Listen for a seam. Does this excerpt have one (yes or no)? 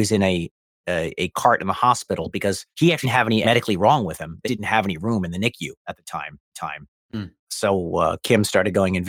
yes